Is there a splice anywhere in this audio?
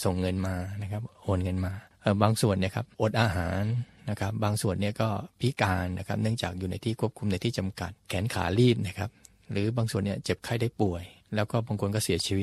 no; 0 cuts

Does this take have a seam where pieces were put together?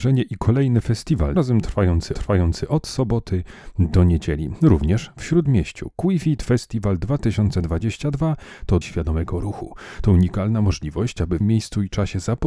yes; 4 cuts; at 1.4 s, 2.2 s, 8.8 s, 11.4 s

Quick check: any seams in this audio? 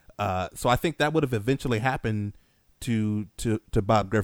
no; 0 cuts

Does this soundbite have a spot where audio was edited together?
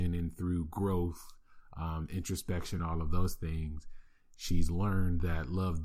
no; 0 cuts

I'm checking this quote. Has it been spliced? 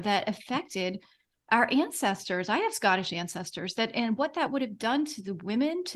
no; 0 cuts

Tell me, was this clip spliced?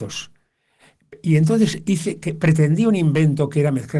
no; 0 cuts

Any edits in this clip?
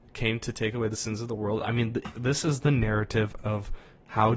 no; 0 cuts

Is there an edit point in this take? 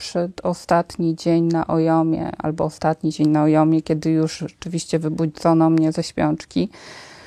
no; 0 cuts

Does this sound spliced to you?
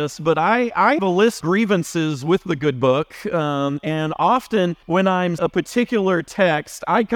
yes; 4 cuts; at 1.0 s, 1.4 s, 4.8 s, 5.4 s

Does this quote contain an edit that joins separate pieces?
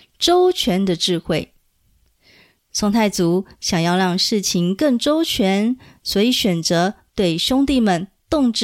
no; 0 cuts

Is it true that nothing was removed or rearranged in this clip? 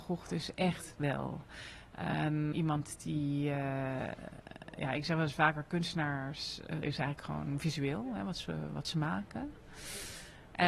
no; 2 cuts; at 2.5 s, 6.8 s

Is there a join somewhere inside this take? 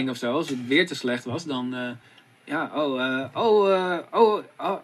no; 0 cuts

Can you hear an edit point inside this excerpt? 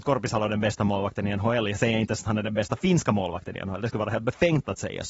no; 0 cuts

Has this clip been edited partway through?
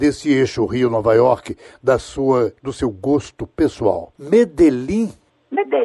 no; 0 cuts

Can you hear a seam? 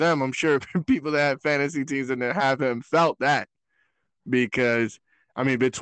no; 0 cuts

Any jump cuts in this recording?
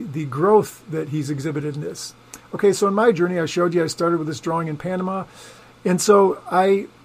no; 0 cuts

